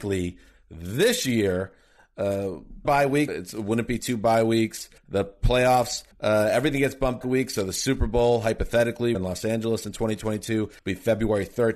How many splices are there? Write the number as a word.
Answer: seven